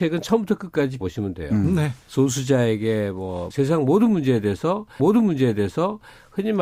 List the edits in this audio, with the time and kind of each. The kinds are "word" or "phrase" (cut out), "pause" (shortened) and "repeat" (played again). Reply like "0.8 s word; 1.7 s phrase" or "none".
1.0 s word; 2.0 s pause; 3.5 s phrase; 5.0 s repeat

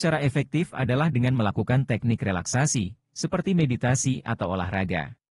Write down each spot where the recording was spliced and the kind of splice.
none

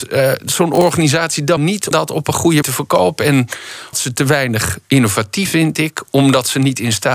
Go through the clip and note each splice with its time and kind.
1.6 s word; 1.9 s word; 2.6 s word; 3.9 s word; 5.5 s word

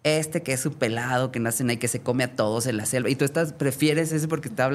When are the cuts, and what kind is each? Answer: none

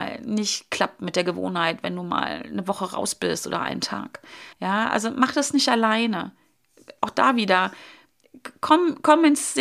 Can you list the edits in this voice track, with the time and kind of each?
4.5 s pause

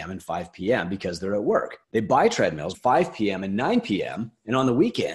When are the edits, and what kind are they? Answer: 1.8 s pause; 2.7 s word

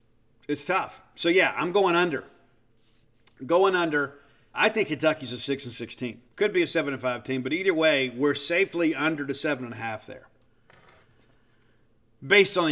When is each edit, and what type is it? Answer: 4.5 s word; 6.3 s pause

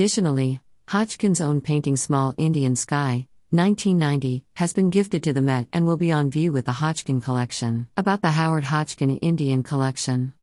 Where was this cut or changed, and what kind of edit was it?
7.9 s pause

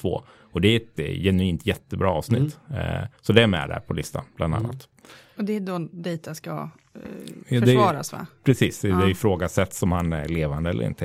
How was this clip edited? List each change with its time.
3.2 s pause

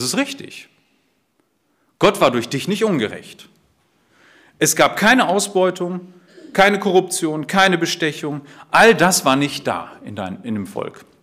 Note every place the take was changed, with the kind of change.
none

